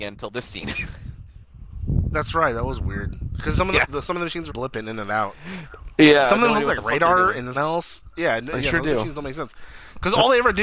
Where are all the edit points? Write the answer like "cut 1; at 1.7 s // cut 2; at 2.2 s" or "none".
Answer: cut 1; at 4.5 s // cut 2; at 7.5 s